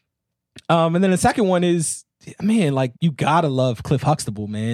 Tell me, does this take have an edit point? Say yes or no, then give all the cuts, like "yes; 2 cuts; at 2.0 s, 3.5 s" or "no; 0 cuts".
yes; 1 cut; at 3.0 s